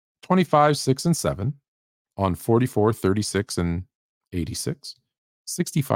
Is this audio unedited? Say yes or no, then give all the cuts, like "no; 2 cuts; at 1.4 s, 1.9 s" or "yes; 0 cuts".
yes; 0 cuts